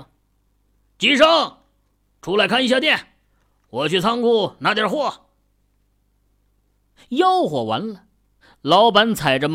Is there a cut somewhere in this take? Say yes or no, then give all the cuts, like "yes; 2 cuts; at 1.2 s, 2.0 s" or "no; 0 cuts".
no; 0 cuts